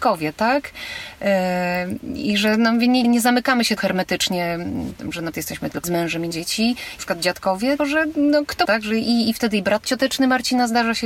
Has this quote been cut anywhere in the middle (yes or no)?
yes